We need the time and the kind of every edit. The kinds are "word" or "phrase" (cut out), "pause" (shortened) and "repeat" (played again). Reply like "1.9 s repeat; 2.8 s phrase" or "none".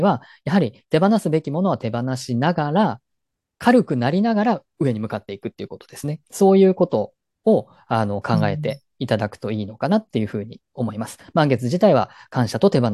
6.2 s pause